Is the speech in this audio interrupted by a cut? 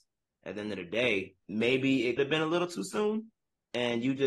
yes; 2 cuts; at 1.4 s, 2.2 s

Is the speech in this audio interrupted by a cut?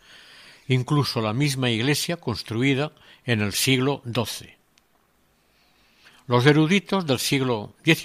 no; 0 cuts

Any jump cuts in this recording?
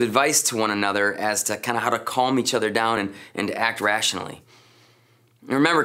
no; 0 cuts

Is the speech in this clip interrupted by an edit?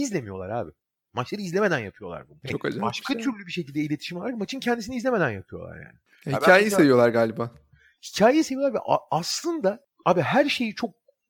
no; 0 cuts

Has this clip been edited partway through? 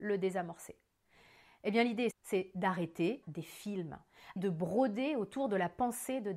yes; 3 cuts; at 2.1 s, 3.2 s, 4.4 s

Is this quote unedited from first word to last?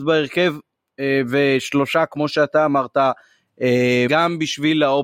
no; 1 cut; at 4.1 s

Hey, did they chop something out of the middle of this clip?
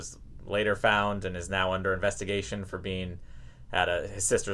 no; 0 cuts

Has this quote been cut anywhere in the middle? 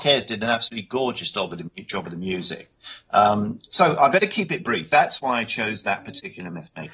no; 0 cuts

